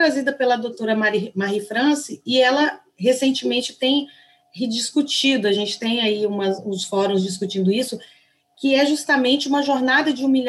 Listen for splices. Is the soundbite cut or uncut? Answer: uncut